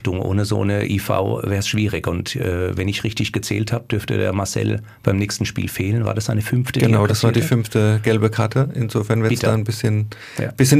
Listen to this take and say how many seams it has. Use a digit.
0